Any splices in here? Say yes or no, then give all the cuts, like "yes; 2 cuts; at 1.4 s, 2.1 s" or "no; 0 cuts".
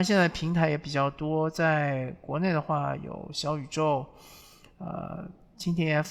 no; 0 cuts